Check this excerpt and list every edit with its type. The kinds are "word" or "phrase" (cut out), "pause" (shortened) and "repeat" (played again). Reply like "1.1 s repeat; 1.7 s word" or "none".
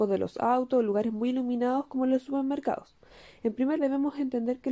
3.8 s word

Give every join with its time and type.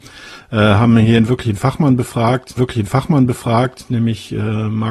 2.6 s repeat

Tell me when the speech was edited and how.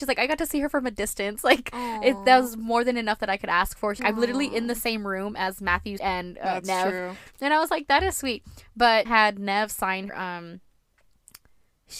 4.0 s word; 6.0 s word; 8.1 s word; 9.0 s word; 10.1 s word

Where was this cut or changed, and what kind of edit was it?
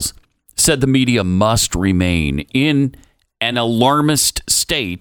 none

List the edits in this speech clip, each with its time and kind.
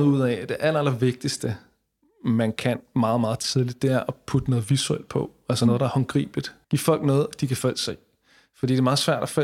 6.6 s pause

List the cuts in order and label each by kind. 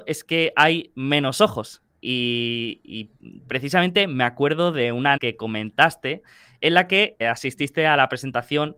5.2 s word; 7.2 s word

